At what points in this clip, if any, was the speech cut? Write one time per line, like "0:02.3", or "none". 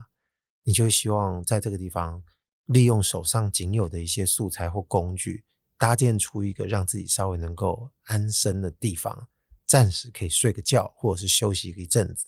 none